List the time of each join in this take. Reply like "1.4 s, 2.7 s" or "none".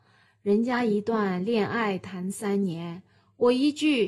none